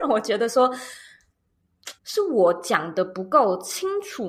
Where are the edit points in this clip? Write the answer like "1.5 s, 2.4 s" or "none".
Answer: 2.0 s